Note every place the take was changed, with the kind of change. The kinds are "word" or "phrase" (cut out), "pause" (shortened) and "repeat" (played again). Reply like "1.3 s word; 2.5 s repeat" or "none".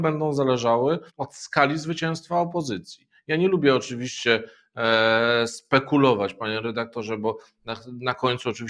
1.1 s pause